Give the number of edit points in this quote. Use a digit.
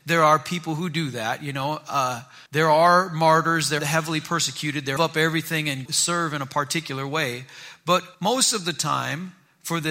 5